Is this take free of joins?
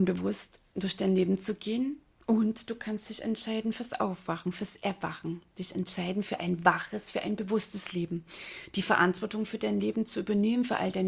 yes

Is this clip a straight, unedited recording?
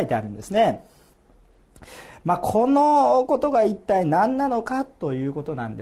yes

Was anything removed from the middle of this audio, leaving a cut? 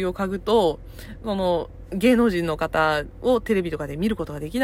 no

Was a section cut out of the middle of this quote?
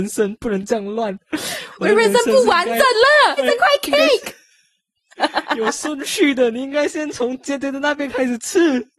yes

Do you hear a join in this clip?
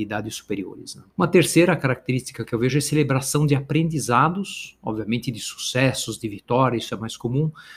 yes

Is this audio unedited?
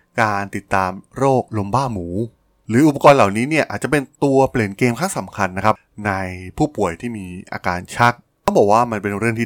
yes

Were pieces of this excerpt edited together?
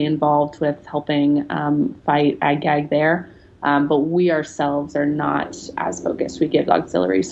no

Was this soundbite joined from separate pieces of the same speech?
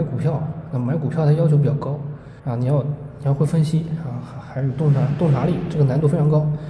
yes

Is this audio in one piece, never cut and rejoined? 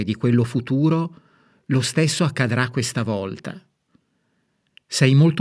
yes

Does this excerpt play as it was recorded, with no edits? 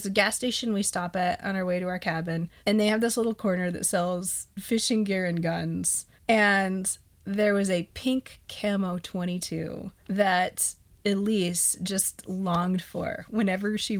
no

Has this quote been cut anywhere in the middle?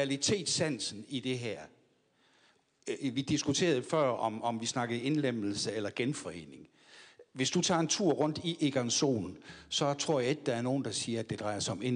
no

